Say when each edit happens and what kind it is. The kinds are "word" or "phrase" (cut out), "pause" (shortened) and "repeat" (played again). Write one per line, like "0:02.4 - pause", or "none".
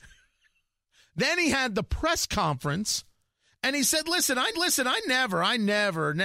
0:04.5 - repeat

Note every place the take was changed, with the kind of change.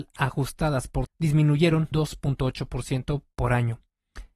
0:01.1 - word
0:01.9 - phrase

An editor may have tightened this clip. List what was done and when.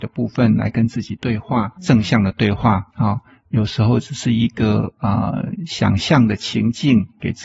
0:01.8 - word
0:02.9 - pause

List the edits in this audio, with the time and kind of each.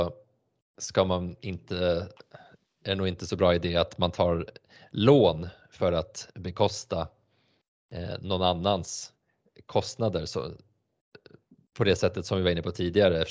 none

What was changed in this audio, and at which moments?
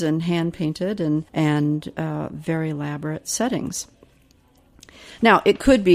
0:01.3 - pause

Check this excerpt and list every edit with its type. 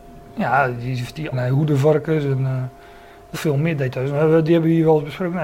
0:01.3 - phrase
0:03.3 - phrase

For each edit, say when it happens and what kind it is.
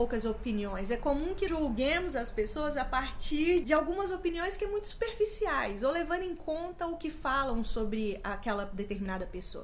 0:01.5 - word
0:03.6 - word

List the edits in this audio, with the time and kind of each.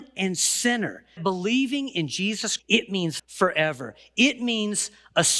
0:01.2 - word
0:02.6 - word
0:03.2 - word

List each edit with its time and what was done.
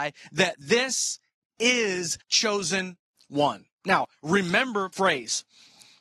0:02.2 - word
0:04.9 - word

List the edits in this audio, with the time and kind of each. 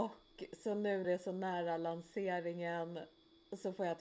0:01.0 - word

